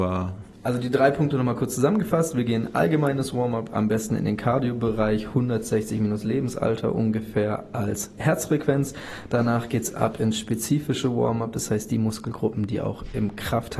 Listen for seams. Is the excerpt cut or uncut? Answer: uncut